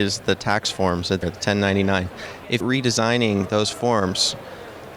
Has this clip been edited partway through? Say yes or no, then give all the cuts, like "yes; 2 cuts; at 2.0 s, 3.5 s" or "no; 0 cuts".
yes; 2 cuts; at 1.2 s, 2.6 s